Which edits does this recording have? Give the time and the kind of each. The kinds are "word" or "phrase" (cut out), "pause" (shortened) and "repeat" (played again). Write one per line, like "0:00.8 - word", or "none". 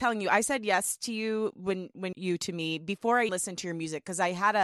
0:02.1 - phrase
0:03.3 - word